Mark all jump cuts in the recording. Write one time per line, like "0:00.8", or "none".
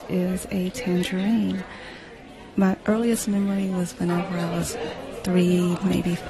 none